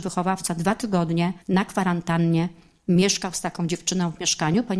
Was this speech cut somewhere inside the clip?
yes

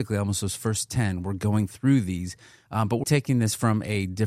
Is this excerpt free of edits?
no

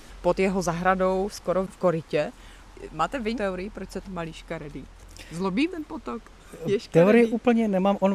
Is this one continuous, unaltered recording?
no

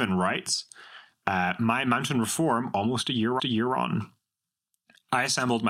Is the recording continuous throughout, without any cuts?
no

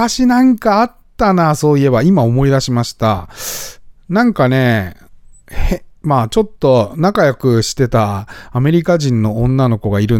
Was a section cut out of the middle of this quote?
no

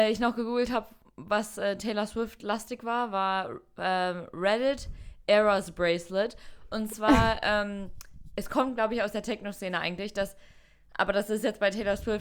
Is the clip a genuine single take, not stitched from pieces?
yes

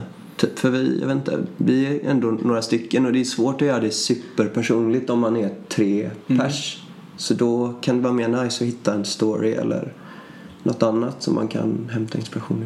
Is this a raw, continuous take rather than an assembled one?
yes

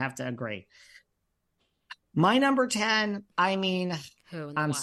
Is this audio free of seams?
no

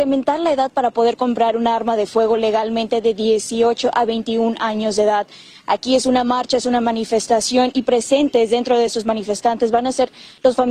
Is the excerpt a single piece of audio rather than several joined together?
yes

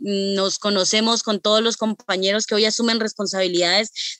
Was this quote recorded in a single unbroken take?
yes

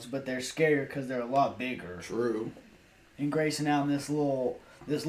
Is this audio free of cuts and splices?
yes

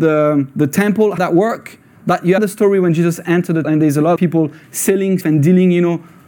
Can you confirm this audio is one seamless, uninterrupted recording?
no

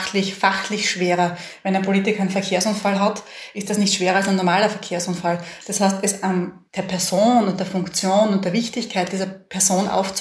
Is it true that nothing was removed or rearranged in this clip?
no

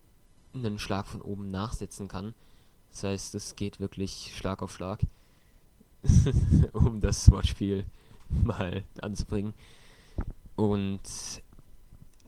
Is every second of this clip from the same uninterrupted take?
no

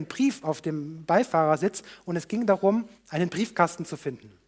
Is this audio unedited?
no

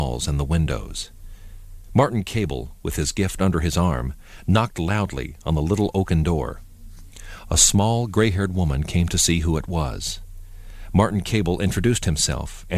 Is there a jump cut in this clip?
no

